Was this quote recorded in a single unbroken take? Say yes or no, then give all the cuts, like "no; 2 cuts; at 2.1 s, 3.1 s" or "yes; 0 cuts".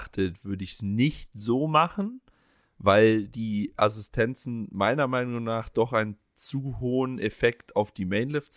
yes; 0 cuts